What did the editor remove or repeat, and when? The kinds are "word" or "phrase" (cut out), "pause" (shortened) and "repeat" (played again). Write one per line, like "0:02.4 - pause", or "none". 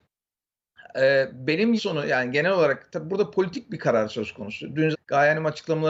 0:01.8 - word
0:04.9 - word